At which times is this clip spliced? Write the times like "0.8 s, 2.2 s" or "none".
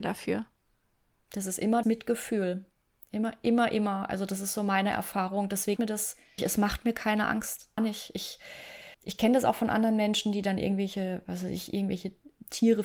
1.8 s, 5.8 s, 6.4 s, 7.8 s, 8.9 s